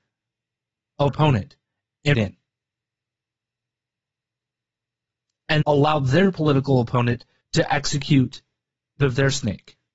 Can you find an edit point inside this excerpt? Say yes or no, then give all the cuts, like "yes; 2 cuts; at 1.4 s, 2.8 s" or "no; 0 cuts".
yes; 5 cuts; at 1.1 s, 2.1 s, 5.6 s, 7.4 s, 9.0 s